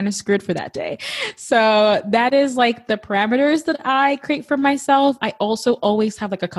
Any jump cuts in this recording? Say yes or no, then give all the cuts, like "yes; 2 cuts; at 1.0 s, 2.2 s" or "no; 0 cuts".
no; 0 cuts